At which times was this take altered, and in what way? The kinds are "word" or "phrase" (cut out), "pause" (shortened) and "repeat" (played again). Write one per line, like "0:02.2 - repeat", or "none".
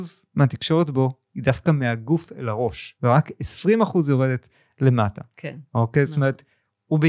none